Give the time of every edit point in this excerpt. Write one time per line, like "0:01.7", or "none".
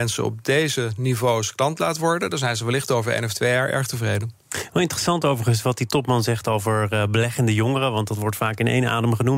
none